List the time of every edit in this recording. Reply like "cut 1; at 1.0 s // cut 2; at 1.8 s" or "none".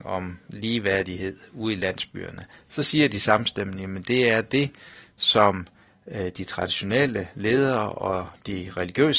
none